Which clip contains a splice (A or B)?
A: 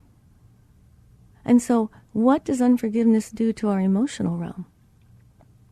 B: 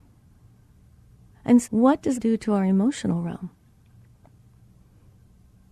B